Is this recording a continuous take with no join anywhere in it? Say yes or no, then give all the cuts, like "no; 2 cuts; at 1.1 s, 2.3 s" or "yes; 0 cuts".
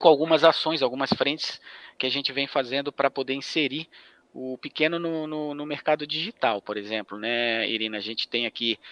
yes; 0 cuts